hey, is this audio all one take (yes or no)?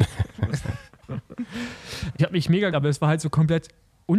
no